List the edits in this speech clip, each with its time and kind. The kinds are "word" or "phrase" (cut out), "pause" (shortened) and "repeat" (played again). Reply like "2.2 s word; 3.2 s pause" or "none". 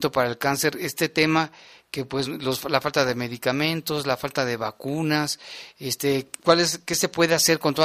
none